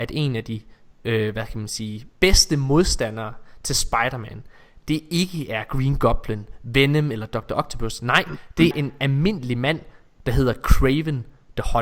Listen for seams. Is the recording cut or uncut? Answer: cut